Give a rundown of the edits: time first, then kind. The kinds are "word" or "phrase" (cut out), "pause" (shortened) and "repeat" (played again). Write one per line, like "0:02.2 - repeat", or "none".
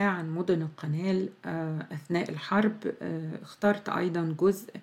none